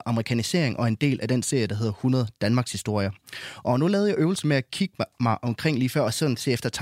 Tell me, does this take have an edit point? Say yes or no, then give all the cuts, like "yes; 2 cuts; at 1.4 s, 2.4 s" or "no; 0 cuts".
no; 0 cuts